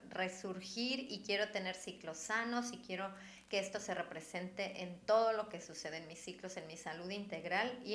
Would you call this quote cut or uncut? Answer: uncut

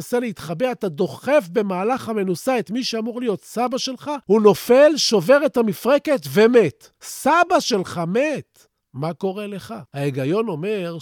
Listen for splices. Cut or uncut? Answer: cut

